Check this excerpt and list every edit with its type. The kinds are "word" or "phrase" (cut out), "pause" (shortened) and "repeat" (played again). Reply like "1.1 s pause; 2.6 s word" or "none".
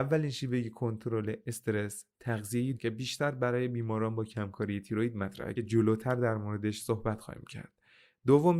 2.7 s word